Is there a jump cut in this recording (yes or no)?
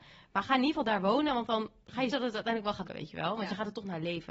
yes